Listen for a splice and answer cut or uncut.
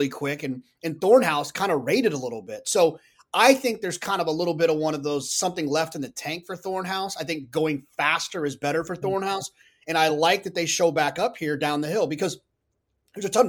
uncut